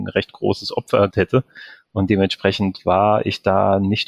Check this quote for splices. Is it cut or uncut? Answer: cut